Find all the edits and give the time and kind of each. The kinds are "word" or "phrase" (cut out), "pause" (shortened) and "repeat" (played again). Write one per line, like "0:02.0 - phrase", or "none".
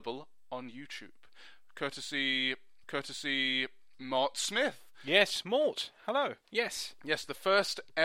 0:02.8 - repeat